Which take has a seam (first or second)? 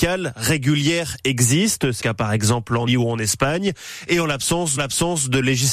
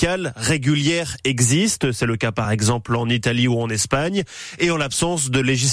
first